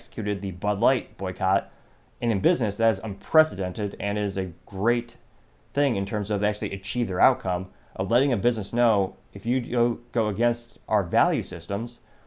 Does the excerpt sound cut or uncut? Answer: uncut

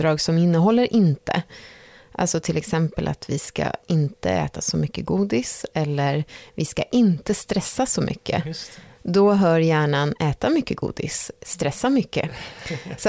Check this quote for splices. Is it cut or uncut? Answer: uncut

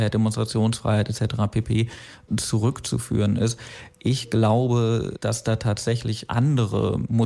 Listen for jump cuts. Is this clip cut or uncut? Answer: uncut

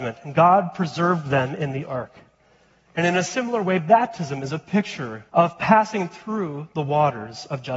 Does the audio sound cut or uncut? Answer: cut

